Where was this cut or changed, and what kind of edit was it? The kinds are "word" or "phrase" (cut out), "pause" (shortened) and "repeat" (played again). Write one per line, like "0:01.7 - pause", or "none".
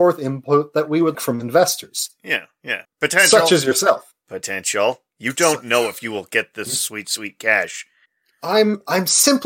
0:01.1 - word
0:02.8 - pause
0:08.1 - pause